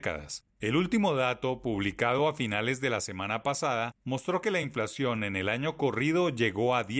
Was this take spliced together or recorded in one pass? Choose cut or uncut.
uncut